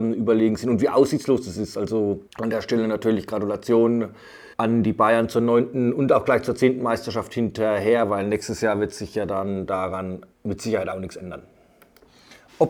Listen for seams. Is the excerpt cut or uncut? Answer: cut